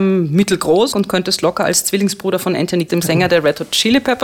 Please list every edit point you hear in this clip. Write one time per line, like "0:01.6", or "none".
0:00.9
0:02.9